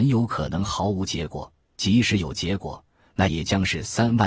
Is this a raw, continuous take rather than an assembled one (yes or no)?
yes